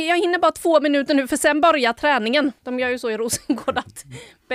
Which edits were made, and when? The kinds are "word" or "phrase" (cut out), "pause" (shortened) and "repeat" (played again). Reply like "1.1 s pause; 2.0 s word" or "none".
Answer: 2.6 s pause